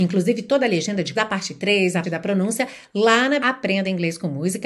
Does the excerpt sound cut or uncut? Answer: cut